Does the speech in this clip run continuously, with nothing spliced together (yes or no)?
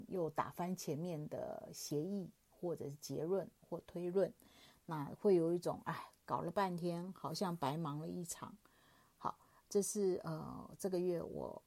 yes